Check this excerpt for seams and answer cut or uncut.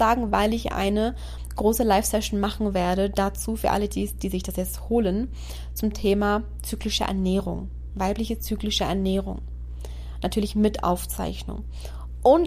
uncut